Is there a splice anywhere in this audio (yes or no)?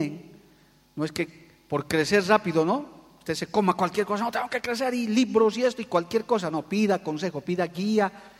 no